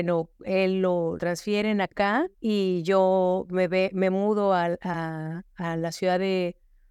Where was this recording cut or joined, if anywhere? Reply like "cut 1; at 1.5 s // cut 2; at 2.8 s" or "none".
cut 1; at 1.2 s // cut 2; at 2.3 s